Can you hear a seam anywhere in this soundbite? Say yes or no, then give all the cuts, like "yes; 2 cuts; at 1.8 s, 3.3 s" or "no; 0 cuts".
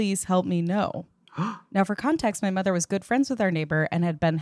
no; 0 cuts